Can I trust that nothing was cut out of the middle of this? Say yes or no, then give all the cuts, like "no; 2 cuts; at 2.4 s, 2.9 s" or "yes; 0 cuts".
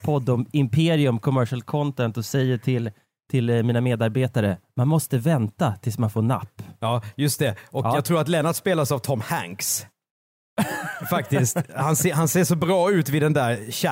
yes; 0 cuts